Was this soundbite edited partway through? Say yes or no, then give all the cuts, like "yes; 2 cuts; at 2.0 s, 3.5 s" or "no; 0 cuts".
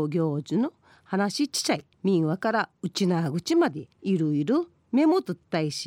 yes; 2 cuts; at 1.9 s, 3.9 s